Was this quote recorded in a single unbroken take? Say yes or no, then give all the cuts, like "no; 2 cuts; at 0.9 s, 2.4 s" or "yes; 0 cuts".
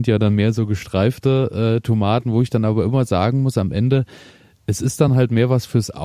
yes; 0 cuts